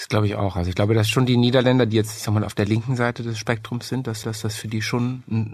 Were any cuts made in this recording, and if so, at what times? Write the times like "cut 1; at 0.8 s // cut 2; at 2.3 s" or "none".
cut 1; at 4.2 s